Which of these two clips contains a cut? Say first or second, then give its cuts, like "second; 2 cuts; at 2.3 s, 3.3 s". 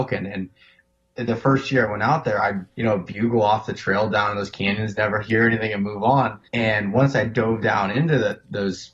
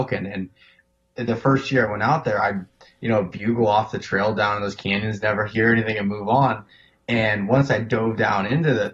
first; 2 cuts; at 2.7 s, 6.5 s